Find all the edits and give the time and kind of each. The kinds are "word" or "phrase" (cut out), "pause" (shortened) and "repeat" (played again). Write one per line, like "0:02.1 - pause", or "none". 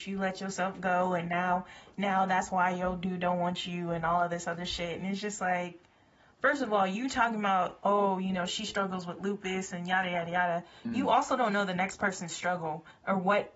none